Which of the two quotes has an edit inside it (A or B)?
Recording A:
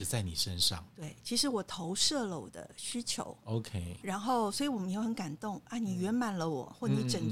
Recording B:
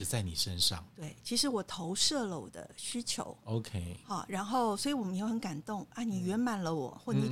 A